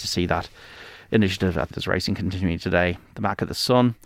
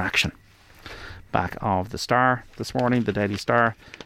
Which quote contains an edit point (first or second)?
first